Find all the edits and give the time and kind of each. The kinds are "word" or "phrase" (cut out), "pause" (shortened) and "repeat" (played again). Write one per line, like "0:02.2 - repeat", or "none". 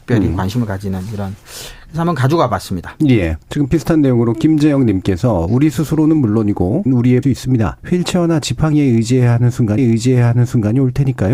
0:03.4 - pause
0:06.9 - word
0:07.2 - phrase
0:07.8 - pause
0:09.8 - repeat

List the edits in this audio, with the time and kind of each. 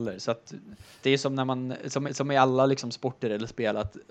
0:01.0 - word
0:02.0 - repeat

